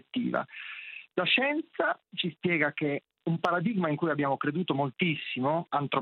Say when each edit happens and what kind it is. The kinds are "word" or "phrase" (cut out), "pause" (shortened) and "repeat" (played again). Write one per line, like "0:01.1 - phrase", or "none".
none